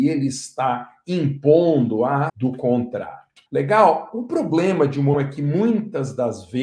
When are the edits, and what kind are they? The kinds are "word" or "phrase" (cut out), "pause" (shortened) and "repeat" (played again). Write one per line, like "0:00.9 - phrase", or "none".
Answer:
0:02.3 - word
0:03.5 - pause
0:05.1 - word